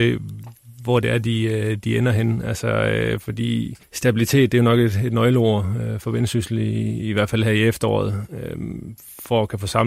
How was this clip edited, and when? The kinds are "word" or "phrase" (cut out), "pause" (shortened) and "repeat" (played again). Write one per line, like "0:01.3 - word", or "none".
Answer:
0:03.8 - pause